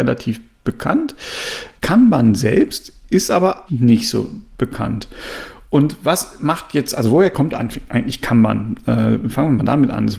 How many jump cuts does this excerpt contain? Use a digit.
2